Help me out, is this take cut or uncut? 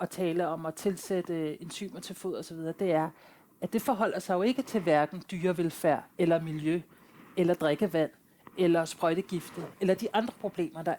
uncut